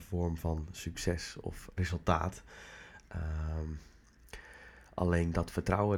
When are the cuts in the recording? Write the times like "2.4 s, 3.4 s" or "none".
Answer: 1.8 s